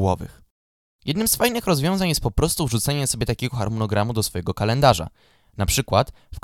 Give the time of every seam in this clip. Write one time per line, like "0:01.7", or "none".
none